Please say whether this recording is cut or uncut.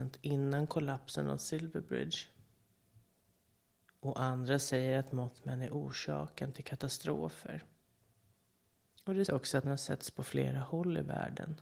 cut